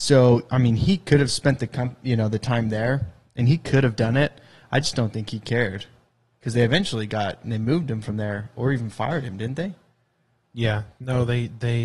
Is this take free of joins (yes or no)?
yes